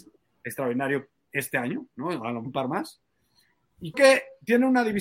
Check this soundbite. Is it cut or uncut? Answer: cut